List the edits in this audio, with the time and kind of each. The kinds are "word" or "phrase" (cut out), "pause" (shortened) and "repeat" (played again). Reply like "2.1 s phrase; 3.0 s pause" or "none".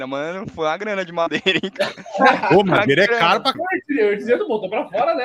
3.5 s word

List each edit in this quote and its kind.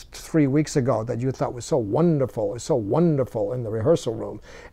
2.5 s repeat

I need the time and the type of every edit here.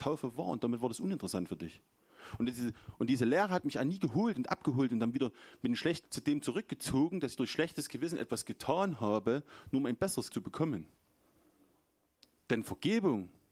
6.0 s word; 10.3 s word

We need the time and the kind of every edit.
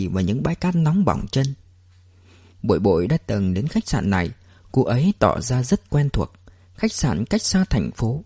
none

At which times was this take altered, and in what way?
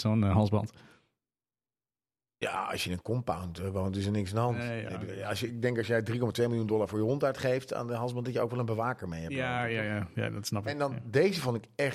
none

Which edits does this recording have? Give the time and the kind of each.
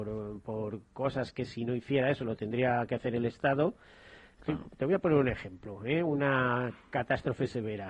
none

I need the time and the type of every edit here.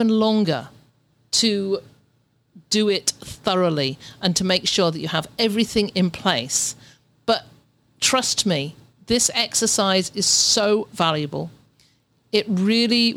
none

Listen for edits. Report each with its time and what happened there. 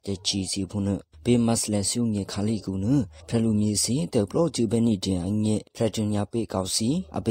none

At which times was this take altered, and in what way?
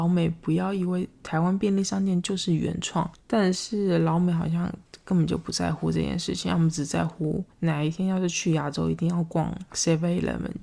7.5 s pause; 9.7 s pause

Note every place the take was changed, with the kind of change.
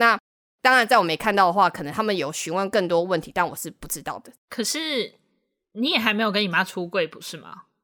4.4 s pause

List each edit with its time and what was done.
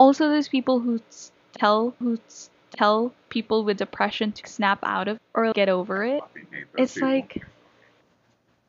2.0 s repeat; 4.4 s word; 5.2 s word; 5.5 s word

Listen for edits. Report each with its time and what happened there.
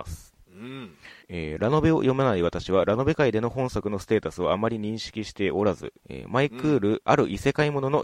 1.2 s pause; 6.0 s pause

